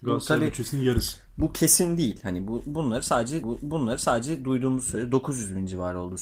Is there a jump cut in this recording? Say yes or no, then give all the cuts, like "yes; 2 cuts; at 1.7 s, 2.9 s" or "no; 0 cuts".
yes; 1 cut; at 3.4 s